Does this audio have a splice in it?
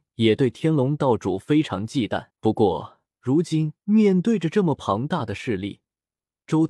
yes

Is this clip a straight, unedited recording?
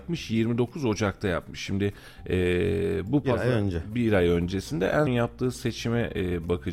no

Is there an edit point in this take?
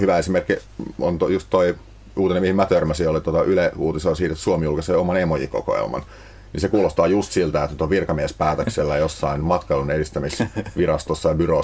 no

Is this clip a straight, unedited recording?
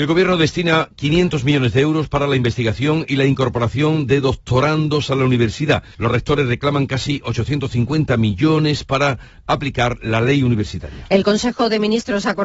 no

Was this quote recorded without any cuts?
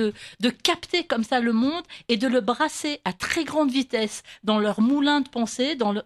yes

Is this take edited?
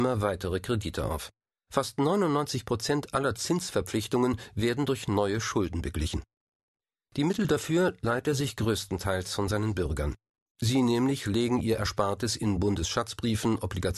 no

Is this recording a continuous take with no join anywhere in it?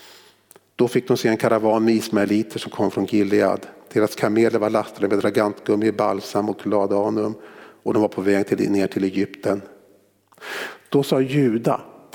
yes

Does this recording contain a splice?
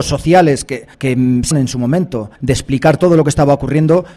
yes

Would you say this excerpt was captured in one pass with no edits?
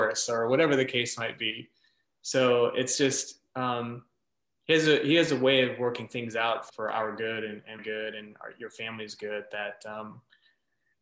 no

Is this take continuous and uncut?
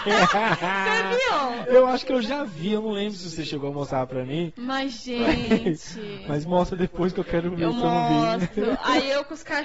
yes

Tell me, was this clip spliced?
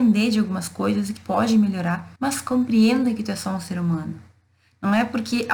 yes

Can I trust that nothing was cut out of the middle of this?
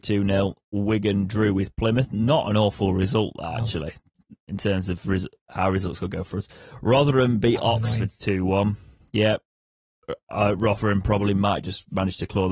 yes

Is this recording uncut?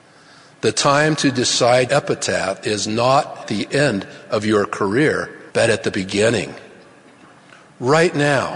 no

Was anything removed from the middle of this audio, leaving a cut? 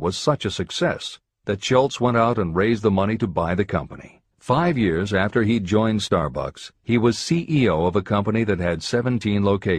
yes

